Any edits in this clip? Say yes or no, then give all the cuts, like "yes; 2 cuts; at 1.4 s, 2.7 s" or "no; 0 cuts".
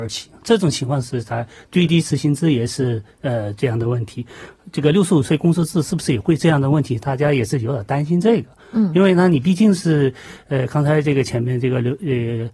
no; 0 cuts